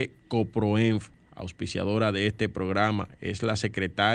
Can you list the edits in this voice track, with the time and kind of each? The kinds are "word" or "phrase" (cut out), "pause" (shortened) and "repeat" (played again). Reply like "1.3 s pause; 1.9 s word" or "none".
1.1 s pause

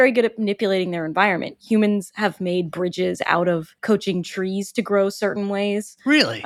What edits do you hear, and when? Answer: 3.8 s pause

